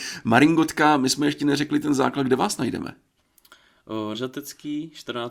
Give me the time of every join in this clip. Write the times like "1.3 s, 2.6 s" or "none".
4.1 s